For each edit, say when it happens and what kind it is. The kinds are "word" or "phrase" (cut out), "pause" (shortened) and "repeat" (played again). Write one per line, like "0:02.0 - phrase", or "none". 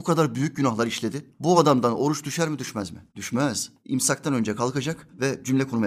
none